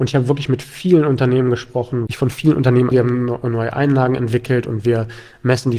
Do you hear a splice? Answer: yes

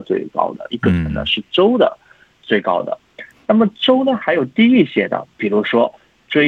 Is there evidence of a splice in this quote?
no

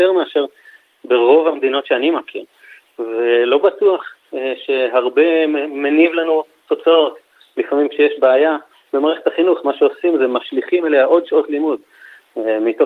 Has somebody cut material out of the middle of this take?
no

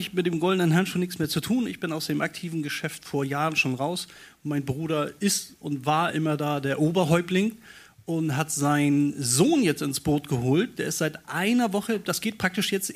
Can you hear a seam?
no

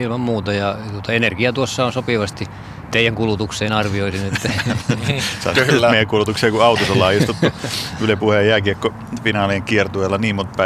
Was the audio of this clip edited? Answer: yes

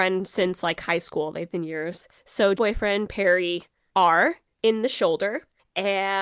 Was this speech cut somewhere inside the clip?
yes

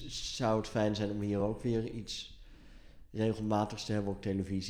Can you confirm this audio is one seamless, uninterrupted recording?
yes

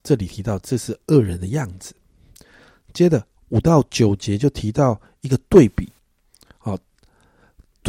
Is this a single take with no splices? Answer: yes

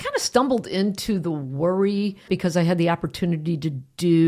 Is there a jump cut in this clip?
yes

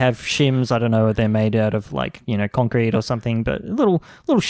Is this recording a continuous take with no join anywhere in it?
yes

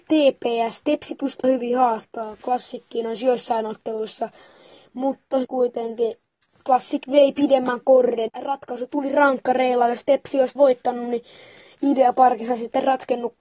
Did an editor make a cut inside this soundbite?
yes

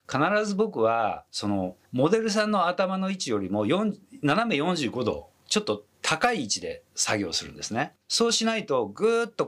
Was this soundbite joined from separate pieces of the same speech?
yes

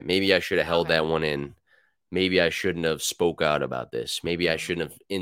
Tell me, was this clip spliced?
no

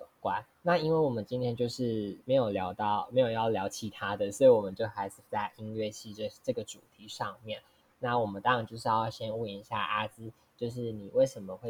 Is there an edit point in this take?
yes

